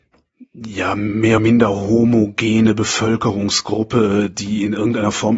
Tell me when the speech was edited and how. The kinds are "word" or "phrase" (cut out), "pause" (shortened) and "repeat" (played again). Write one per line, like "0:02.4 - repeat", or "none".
0:01.4 - word